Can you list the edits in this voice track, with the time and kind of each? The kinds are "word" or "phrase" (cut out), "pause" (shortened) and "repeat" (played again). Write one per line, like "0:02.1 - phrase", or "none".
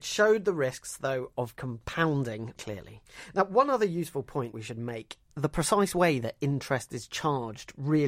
0:02.6 - word
0:04.5 - phrase
0:05.3 - word